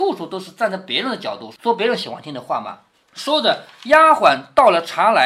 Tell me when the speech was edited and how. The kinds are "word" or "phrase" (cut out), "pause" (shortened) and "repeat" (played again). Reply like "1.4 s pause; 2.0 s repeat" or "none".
3.0 s pause